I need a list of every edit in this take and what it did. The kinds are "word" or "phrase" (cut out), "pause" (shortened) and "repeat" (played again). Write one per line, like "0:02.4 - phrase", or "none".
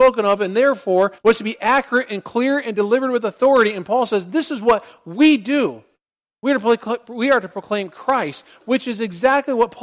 0:01.2 - pause